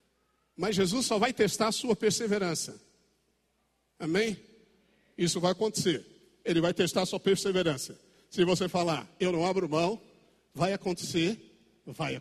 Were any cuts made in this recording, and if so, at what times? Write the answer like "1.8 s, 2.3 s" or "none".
none

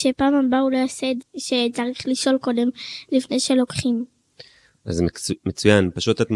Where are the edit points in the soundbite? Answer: 1.2 s

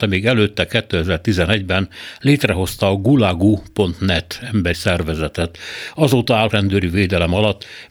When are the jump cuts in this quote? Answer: 4.7 s, 6.5 s

